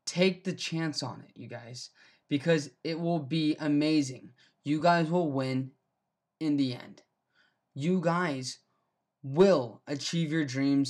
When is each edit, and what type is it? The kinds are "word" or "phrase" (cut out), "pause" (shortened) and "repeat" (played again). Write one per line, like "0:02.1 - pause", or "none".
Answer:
none